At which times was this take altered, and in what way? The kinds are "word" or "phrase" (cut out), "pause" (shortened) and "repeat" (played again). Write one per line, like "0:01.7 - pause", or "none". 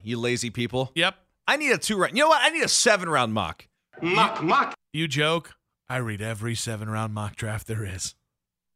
none

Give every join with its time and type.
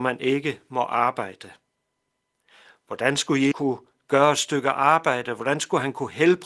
0:03.5 - word

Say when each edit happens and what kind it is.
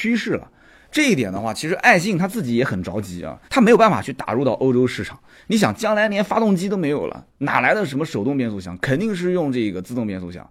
0:03.5 - pause

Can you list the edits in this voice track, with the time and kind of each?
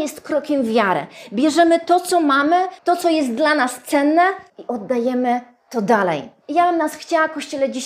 0:02.8 - pause
0:04.5 - pause

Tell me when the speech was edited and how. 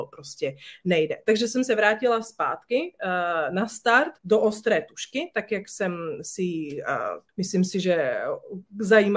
0:04.2 - pause
0:07.3 - pause

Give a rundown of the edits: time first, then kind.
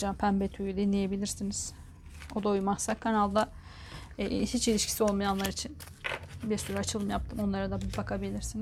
none

